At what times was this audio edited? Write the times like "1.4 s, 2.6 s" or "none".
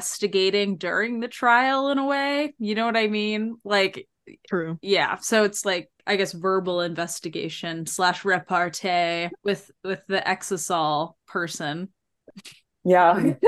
6.0 s, 9.4 s, 11.2 s